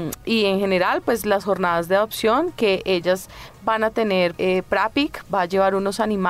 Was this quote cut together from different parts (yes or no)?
yes